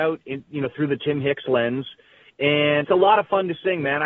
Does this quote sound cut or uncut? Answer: cut